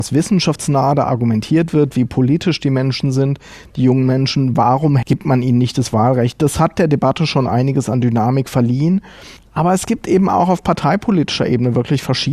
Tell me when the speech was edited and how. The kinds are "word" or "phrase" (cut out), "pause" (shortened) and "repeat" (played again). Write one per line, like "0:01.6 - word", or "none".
none